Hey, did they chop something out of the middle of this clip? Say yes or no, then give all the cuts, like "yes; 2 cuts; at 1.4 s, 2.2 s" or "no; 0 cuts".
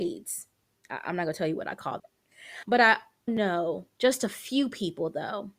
yes; 2 cuts; at 2.0 s, 3.3 s